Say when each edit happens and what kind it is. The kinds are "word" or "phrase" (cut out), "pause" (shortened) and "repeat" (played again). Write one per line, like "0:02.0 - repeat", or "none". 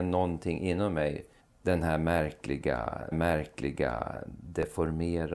0:01.4 - pause
0:03.1 - repeat